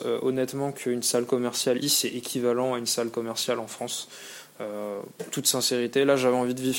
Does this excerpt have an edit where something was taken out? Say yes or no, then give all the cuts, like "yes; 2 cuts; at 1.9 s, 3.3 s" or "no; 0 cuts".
yes; 1 cut; at 1.8 s